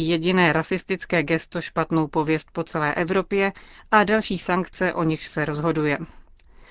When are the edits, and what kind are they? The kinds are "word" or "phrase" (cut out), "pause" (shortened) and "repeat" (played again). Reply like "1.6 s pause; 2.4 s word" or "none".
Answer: none